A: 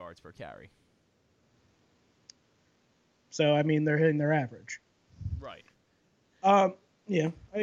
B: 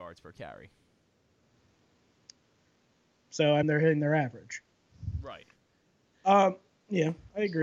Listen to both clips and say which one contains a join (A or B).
B